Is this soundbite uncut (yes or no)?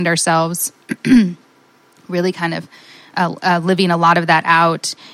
yes